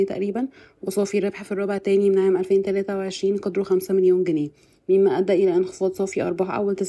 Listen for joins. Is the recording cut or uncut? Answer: uncut